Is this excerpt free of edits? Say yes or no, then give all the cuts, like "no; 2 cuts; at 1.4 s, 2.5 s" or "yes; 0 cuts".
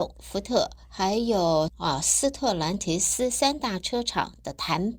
no; 1 cut; at 1.7 s